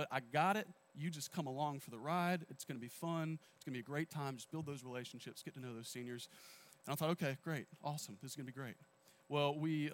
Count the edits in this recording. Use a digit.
0